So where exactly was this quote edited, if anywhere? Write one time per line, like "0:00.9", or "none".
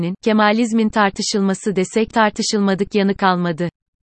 0:02.1